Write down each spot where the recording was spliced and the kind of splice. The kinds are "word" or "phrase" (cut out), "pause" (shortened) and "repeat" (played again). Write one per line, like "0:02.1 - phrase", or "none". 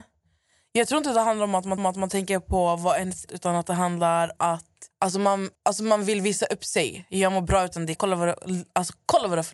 0:01.8 - repeat
0:03.3 - phrase
0:04.4 - word
0:04.9 - pause
0:05.5 - pause
0:08.0 - word